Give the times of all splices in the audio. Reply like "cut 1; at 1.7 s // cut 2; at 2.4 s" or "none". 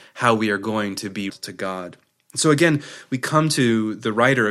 cut 1; at 1.3 s